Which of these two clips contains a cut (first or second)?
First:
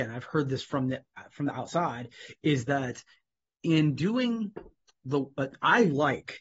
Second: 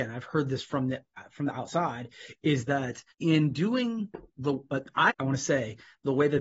second